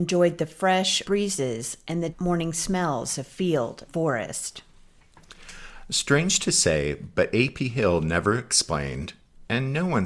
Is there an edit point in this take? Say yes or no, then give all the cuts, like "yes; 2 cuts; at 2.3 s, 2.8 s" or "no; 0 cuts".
yes; 3 cuts; at 1.0 s, 2.1 s, 3.9 s